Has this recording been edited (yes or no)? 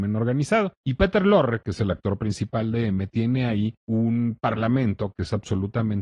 no